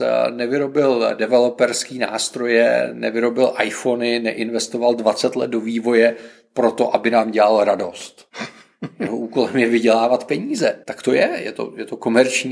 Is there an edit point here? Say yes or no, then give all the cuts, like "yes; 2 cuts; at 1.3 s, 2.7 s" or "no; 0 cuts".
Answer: yes; 1 cut; at 10.8 s